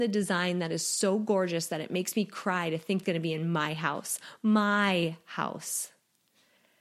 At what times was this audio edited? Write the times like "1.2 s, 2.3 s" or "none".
3.0 s